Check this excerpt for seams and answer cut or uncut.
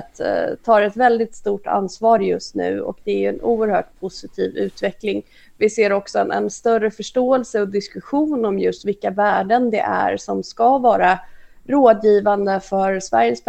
uncut